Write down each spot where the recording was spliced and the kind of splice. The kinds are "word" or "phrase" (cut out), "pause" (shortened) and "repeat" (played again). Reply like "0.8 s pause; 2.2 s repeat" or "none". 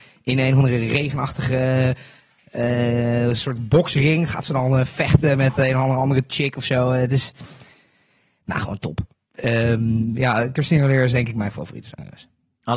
none